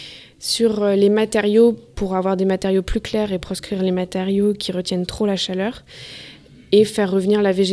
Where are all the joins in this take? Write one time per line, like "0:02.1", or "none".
none